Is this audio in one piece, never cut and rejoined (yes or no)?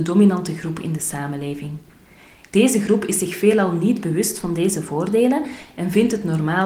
yes